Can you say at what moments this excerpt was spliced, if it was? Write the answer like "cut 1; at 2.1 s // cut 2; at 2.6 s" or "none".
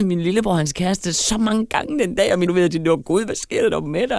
cut 1; at 2.5 s